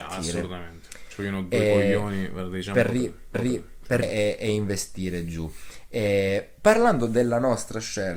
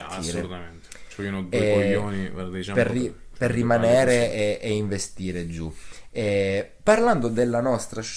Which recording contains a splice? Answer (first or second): first